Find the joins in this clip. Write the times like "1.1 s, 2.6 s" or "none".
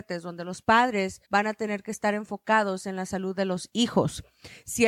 1.2 s